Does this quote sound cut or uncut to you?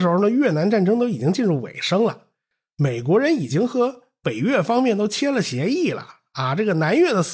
uncut